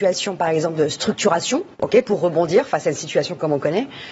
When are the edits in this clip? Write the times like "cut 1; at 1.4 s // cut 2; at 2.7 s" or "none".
cut 1; at 1.7 s